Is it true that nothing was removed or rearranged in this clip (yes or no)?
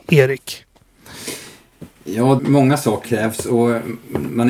no